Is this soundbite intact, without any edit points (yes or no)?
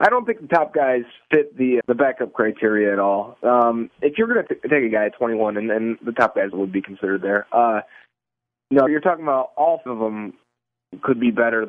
no